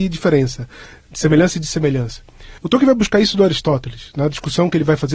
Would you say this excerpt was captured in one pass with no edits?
no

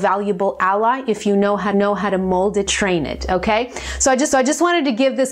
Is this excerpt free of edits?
no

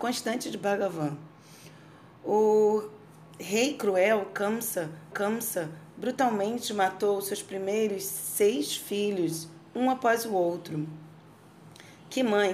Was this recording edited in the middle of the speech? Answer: yes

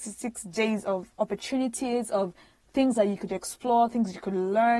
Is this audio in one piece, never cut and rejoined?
yes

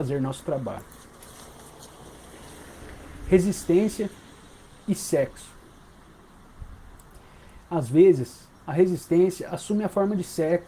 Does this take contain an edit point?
no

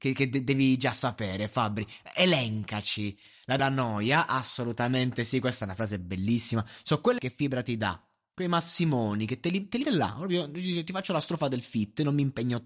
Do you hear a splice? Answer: yes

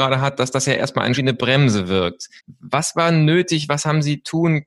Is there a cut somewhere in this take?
yes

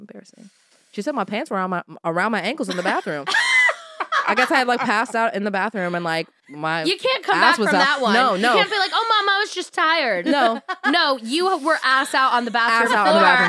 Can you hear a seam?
yes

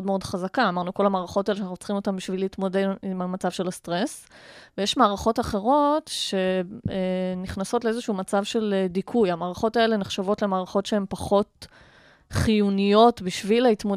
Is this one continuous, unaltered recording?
yes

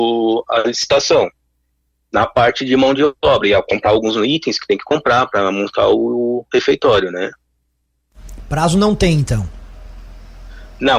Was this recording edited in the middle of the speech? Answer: no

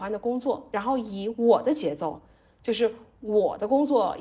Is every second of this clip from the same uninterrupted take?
yes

